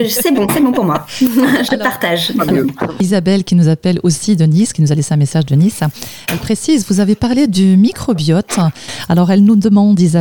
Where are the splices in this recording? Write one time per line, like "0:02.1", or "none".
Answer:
none